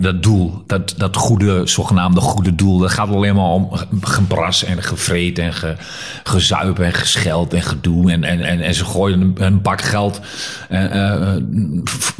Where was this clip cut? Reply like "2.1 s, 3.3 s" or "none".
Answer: 8.4 s